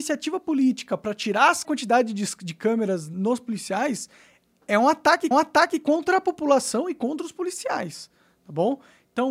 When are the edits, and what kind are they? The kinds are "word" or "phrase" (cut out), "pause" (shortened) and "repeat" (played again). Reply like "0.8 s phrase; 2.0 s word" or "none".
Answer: 1.6 s phrase; 5.3 s repeat

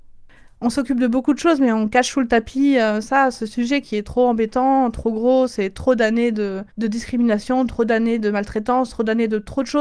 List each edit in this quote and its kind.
6.7 s pause

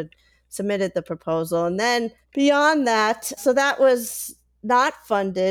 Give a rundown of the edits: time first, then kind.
2.2 s pause; 3.4 s word

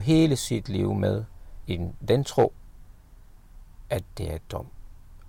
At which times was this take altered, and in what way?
none

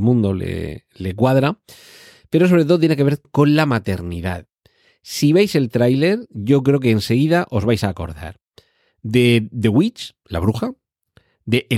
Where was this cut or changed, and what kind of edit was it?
3.2 s word

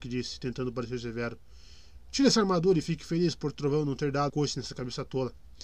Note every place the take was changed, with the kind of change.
4.3 s word

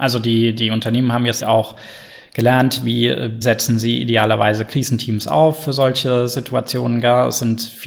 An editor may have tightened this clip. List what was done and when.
1.4 s word; 3.4 s word

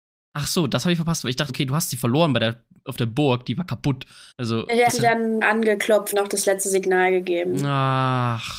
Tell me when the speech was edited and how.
1.5 s word; 4.3 s pause; 4.9 s word; 5.4 s word; 6.1 s word

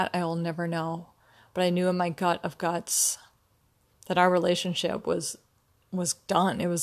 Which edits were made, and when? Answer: none

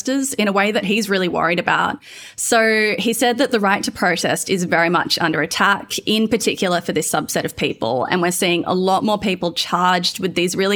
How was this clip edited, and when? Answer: none

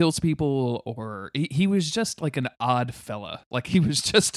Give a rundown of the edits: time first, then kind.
none

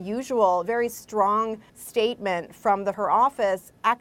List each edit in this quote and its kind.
1.7 s pause; 2.9 s phrase

